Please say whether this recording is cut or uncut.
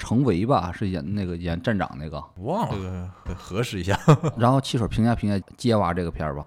cut